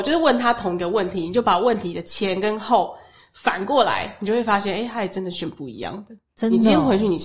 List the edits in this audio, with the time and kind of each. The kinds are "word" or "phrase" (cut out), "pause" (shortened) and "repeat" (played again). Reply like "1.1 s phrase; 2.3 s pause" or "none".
none